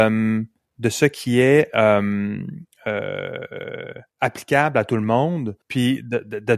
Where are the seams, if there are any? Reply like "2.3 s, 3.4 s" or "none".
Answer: 4.1 s, 5.6 s